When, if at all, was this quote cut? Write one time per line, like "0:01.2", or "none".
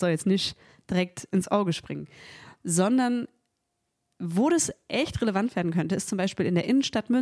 none